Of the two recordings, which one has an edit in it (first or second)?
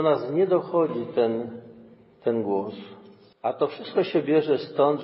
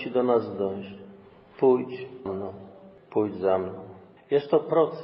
second